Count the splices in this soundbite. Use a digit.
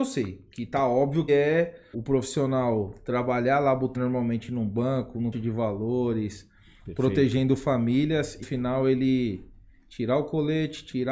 5